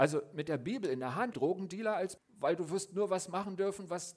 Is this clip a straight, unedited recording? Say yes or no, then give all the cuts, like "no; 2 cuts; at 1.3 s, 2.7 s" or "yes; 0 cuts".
no; 2 cuts; at 1.3 s, 2.2 s